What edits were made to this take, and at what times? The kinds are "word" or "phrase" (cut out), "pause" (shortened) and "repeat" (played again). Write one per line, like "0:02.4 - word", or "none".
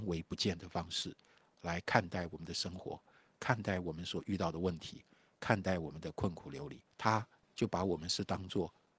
0:06.9 - pause